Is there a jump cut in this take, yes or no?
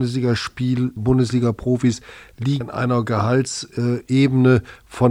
yes